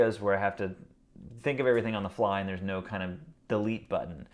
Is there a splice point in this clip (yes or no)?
no